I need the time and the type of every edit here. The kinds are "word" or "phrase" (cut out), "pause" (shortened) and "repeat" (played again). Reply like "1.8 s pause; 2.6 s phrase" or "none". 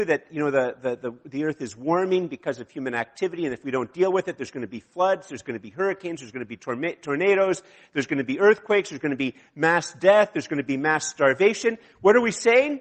none